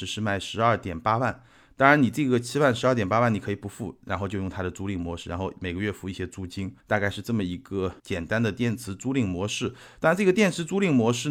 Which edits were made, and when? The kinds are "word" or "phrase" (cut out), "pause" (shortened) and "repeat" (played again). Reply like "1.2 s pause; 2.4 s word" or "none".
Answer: 6.8 s pause; 8.0 s pause